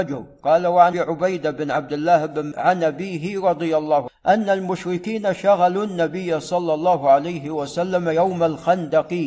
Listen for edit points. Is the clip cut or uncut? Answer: cut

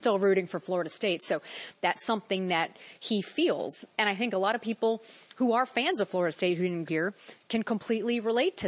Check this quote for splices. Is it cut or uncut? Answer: cut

